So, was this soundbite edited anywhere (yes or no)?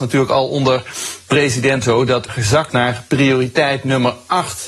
yes